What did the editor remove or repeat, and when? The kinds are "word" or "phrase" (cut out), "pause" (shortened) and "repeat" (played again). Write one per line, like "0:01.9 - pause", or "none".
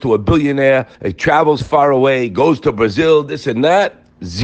0:00.9 - pause